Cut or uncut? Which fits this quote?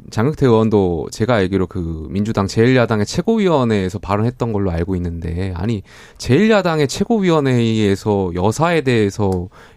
uncut